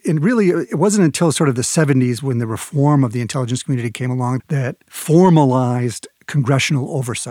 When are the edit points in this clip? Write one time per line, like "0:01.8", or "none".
0:04.4
0:04.8